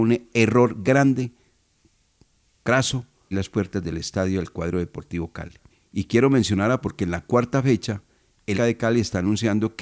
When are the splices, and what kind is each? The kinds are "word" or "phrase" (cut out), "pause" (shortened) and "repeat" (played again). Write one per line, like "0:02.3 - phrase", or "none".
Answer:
0:03.3 - word
0:05.7 - pause
0:06.8 - word
0:08.5 - word